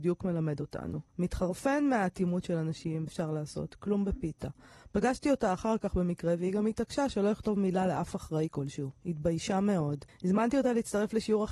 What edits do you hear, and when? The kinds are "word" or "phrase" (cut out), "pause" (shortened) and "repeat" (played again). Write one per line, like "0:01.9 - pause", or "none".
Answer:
0:01.1 - pause
0:03.1 - word
0:10.1 - pause